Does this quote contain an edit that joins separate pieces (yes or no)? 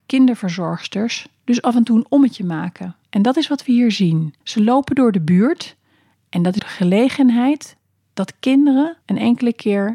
yes